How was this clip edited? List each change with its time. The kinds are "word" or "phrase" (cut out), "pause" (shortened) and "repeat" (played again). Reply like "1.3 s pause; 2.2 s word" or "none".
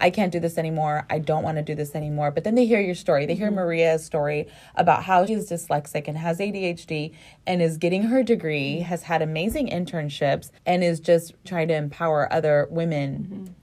5.3 s word; 10.6 s pause; 11.4 s word